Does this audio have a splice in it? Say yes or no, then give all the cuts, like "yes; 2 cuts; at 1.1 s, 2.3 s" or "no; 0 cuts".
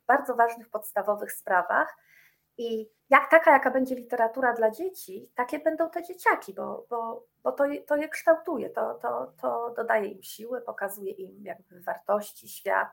yes; 2 cuts; at 3.0 s, 7.3 s